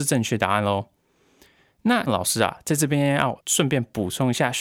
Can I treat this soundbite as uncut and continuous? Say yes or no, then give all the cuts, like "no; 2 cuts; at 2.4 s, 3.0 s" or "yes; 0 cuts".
no; 1 cut; at 2.1 s